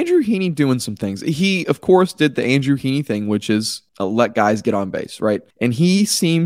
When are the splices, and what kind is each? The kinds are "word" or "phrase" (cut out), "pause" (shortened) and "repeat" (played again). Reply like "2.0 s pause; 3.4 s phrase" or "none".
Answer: 3.9 s pause; 5.5 s pause